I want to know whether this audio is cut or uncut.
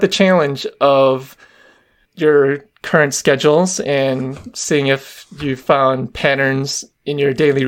cut